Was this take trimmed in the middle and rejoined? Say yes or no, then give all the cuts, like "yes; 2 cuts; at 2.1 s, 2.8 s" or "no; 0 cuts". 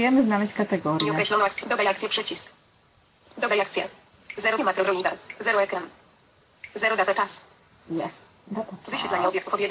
yes; 1 cut; at 4.6 s